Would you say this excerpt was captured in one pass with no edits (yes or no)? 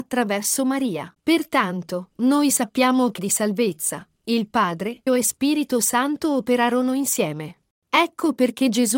no